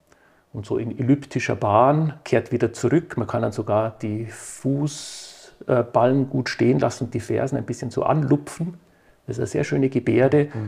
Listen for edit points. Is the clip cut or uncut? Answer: uncut